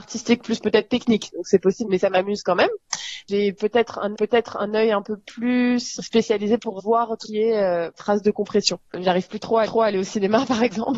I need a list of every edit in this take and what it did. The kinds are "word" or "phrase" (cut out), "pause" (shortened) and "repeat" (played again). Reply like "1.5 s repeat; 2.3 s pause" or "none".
1.8 s word; 4.1 s repeat; 6.0 s word; 6.8 s word; 7.2 s word; 7.9 s word; 9.6 s repeat